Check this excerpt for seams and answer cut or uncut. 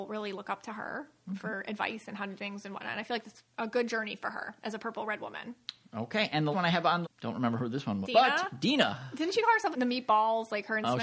cut